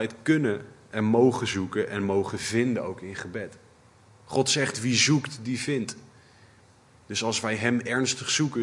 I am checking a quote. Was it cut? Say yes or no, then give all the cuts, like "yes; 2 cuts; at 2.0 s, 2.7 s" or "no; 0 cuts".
no; 0 cuts